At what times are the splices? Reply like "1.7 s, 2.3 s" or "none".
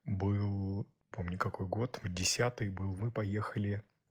1.1 s, 2.0 s, 3.0 s